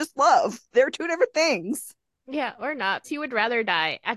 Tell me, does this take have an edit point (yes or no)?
yes